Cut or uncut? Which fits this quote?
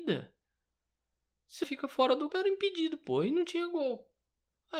cut